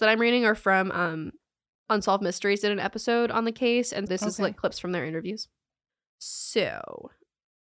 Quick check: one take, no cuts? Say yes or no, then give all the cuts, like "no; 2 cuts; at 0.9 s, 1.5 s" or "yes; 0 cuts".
no; 1 cut; at 4.1 s